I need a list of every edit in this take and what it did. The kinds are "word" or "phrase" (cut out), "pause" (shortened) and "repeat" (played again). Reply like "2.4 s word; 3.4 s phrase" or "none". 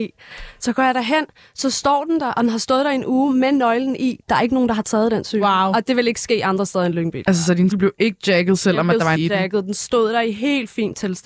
7.7 s word; 9.2 s word